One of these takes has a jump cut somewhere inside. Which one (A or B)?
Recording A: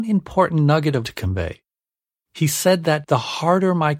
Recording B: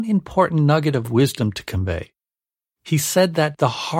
A